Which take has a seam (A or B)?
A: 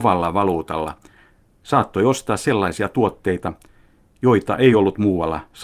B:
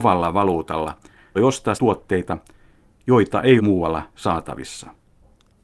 B